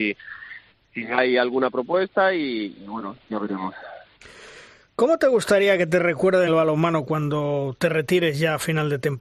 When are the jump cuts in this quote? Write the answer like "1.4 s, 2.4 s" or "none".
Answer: 6.5 s

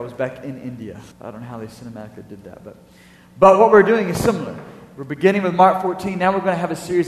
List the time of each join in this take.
1.1 s

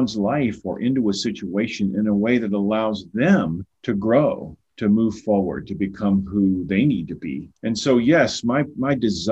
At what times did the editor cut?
3.7 s, 7.6 s

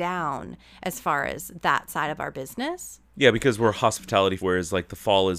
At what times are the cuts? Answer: 4.4 s

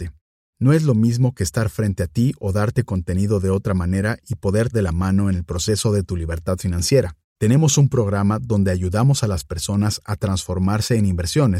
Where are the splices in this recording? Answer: 4.7 s

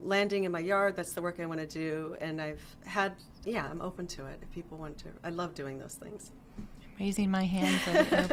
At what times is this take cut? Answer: 3.4 s

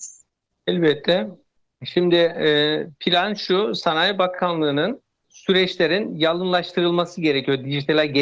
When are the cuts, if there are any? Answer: 5.2 s

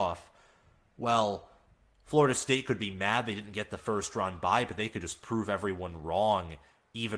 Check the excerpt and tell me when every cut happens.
none

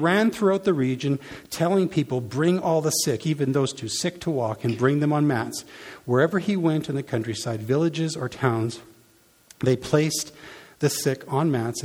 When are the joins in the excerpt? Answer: none

